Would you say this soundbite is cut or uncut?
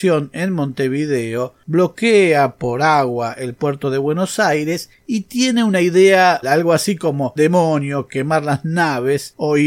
cut